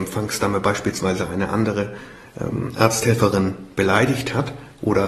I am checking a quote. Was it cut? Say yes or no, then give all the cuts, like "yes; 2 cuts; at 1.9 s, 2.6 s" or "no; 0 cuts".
no; 0 cuts